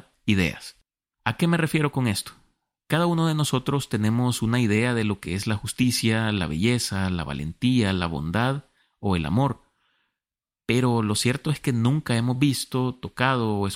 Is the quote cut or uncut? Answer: uncut